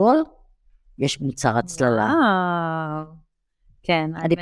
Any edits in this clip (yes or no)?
no